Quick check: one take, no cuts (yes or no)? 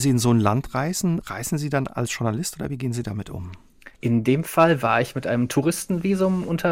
no